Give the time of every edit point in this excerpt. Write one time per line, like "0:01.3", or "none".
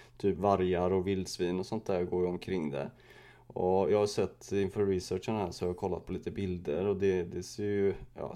none